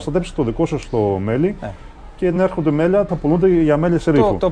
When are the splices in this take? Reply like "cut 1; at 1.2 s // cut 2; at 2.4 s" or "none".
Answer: cut 1; at 2.4 s // cut 2; at 3.1 s